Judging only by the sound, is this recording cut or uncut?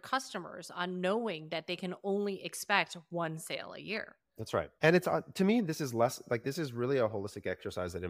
cut